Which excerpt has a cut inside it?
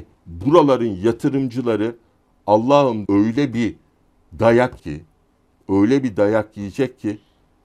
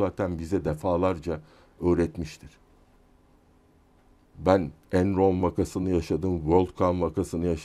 first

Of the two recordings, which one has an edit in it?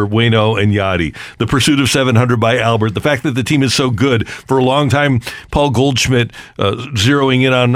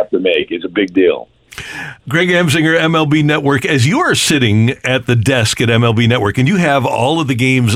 second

